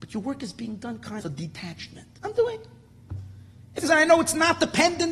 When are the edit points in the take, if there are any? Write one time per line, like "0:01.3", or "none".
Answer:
0:01.2
0:02.2
0:03.8